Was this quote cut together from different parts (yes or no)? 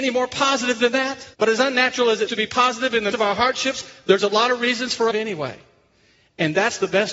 yes